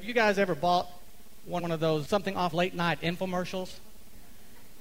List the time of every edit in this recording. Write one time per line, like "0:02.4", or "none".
0:01.6
0:02.1
0:02.5